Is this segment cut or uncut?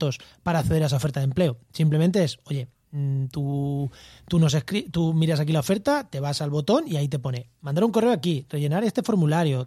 uncut